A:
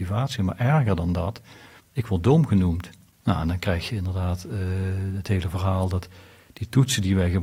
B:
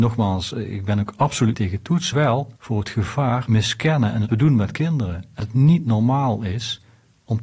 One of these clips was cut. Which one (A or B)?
B